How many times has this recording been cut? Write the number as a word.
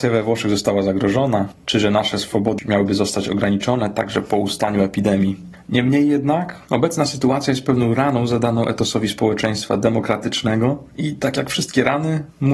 two